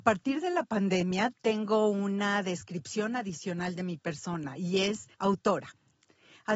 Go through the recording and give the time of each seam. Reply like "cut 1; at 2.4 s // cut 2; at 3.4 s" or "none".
cut 1; at 5.1 s